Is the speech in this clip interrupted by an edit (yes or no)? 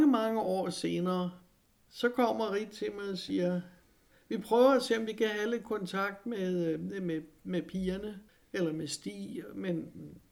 yes